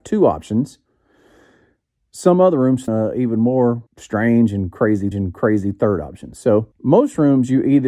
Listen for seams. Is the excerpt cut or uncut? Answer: cut